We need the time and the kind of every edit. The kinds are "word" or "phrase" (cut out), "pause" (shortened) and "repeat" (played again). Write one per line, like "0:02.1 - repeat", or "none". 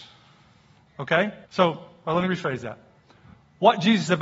0:01.4 - pause
0:02.3 - phrase